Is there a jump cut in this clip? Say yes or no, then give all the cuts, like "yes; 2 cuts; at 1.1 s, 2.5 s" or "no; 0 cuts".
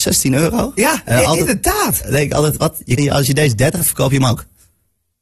yes; 3 cuts; at 2.6 s, 3.0 s, 3.8 s